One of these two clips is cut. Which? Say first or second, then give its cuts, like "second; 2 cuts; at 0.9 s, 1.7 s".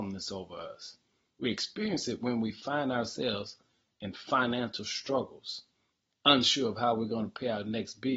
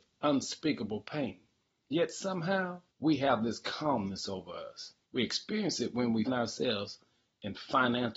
second; 4 cuts; at 1.9 s, 2.9 s, 5.0 s, 6.3 s